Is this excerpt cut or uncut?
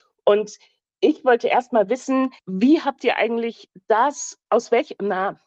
cut